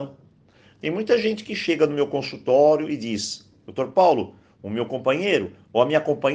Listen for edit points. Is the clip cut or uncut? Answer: uncut